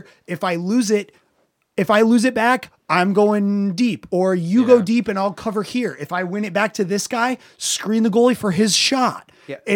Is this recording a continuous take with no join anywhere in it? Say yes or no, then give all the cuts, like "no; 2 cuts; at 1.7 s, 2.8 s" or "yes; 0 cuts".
yes; 0 cuts